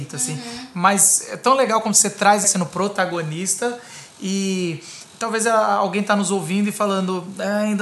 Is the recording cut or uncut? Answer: cut